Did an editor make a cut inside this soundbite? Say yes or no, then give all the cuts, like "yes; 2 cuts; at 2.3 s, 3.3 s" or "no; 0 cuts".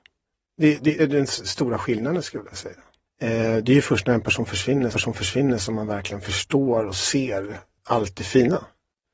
yes; 2 cuts; at 1.0 s, 4.9 s